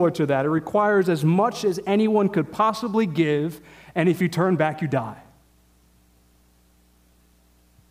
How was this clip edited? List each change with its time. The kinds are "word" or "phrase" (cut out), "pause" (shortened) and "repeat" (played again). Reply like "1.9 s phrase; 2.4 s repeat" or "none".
none

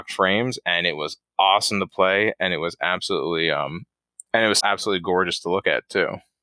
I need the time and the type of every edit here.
4.6 s word

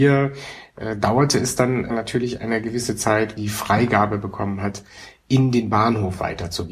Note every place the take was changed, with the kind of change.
3.4 s phrase

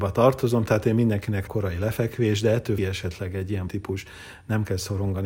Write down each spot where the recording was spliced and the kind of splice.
1.5 s phrase; 2.8 s phrase; 3.7 s word

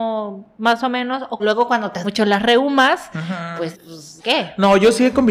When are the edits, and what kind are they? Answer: 1.4 s phrase; 2.0 s word; 3.7 s word; 4.2 s word

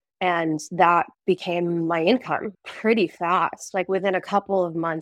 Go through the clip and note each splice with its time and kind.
1.1 s pause; 2.5 s pause

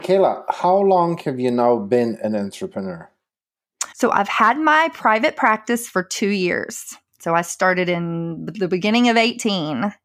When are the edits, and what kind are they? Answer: 3.9 s pause

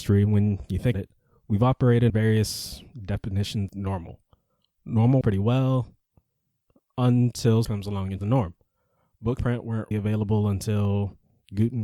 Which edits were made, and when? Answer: 0.9 s word; 2.1 s word; 3.7 s word; 5.2 s word; 7.6 s word; 8.2 s word; 9.4 s word; 9.9 s word

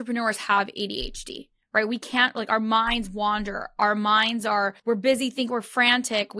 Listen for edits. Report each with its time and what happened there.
4.8 s pause

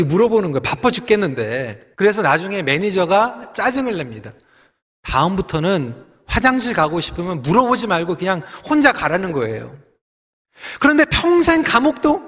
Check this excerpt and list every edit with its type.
1.9 s pause

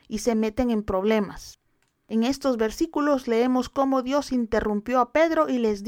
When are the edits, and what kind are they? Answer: none

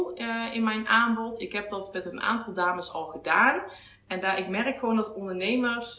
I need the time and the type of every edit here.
none

